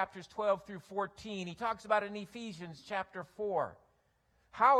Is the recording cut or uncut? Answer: uncut